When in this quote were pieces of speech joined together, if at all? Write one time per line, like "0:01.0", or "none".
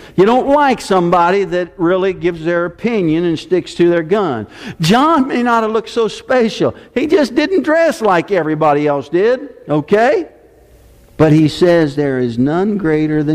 none